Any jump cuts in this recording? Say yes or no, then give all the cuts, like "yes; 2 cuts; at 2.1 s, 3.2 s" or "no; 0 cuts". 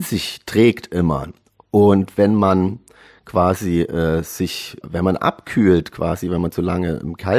yes; 1 cut; at 4.8 s